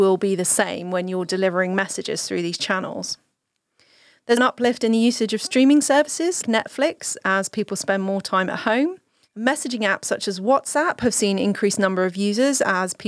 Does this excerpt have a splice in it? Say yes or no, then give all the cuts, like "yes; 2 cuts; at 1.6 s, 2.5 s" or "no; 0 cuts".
yes; 2 cuts; at 4.4 s, 6.4 s